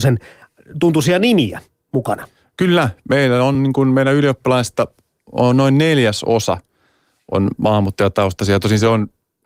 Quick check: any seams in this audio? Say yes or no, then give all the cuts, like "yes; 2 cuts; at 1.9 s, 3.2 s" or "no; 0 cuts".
no; 0 cuts